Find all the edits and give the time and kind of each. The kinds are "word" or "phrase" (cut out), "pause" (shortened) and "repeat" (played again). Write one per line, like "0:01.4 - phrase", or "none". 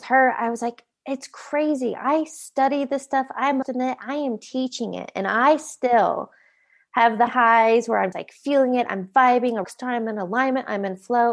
0:03.6 - word
0:07.3 - word
0:08.1 - word
0:09.6 - word